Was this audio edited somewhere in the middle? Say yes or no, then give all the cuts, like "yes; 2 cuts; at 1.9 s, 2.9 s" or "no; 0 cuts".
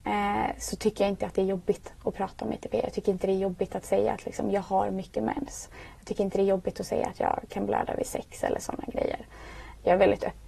no; 0 cuts